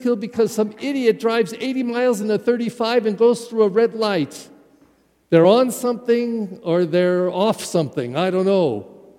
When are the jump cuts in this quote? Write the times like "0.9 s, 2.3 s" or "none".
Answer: none